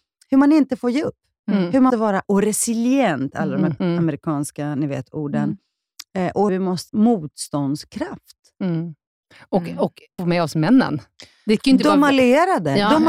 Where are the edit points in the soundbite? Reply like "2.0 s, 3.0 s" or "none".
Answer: 1.9 s, 2.2 s, 3.8 s, 6.5 s, 6.9 s, 10.2 s